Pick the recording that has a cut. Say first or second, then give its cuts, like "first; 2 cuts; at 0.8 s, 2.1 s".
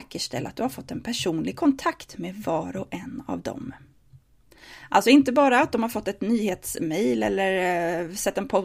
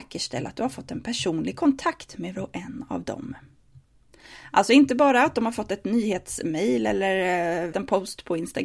second; 2 cuts; at 2.3 s, 7.7 s